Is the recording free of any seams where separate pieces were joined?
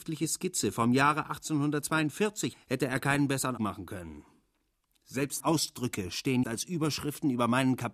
no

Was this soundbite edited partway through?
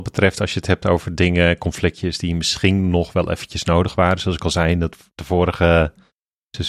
no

